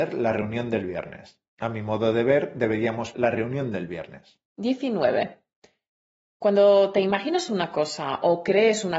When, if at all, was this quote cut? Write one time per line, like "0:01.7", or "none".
0:01.5
0:03.1
0:04.5